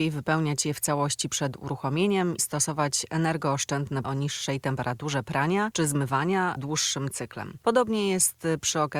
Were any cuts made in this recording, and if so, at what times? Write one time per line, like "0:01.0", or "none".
0:02.4
0:04.0
0:06.6